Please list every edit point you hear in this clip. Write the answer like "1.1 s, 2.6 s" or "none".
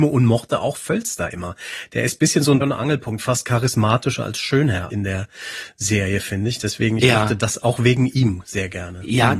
2.6 s, 4.9 s